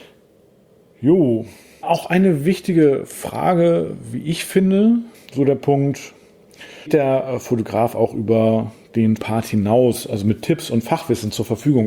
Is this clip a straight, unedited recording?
no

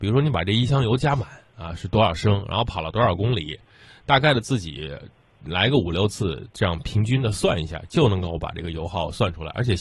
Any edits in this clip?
no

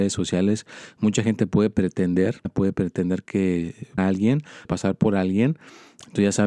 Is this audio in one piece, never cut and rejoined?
no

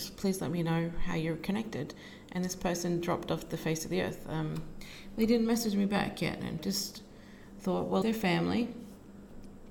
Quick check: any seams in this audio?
yes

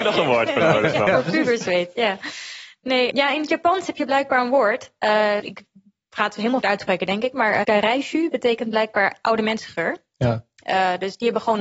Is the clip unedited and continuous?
no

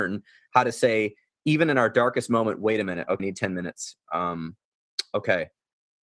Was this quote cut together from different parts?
yes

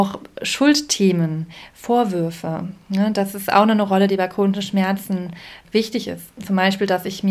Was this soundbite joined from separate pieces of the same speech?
no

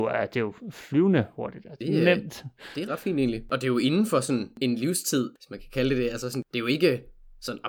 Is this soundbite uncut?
no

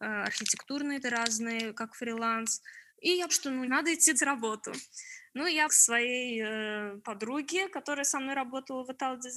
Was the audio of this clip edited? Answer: yes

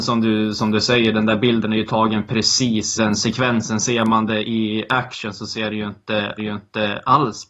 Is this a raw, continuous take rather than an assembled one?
no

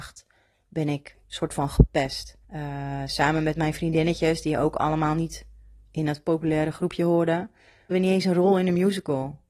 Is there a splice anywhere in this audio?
yes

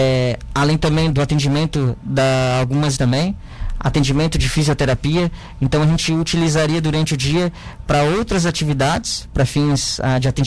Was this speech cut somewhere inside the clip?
yes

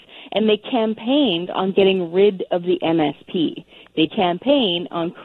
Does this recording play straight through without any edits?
no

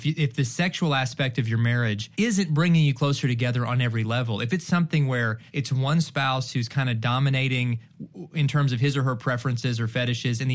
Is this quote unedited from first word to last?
no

